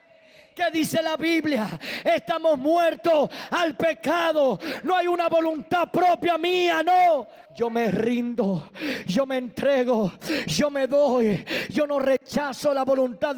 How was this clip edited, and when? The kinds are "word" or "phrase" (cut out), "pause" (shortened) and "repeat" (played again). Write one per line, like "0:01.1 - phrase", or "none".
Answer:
0:07.5 - pause